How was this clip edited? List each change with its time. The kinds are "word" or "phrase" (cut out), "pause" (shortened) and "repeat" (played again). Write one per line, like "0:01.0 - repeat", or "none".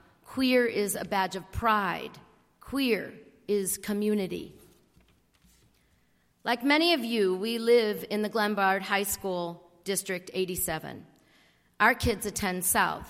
none